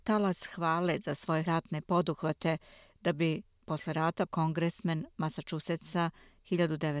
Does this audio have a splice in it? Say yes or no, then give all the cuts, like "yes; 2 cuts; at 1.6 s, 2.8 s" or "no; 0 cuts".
yes; 2 cuts; at 1.5 s, 4.3 s